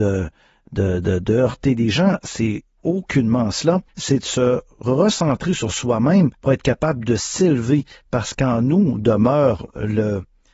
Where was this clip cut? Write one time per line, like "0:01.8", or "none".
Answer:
0:03.9
0:06.3